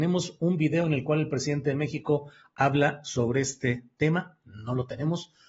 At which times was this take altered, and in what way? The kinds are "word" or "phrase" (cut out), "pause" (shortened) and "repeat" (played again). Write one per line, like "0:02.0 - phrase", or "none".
none